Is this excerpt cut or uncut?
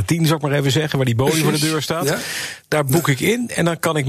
uncut